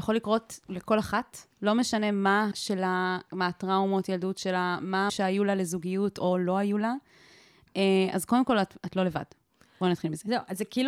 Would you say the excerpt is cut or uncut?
cut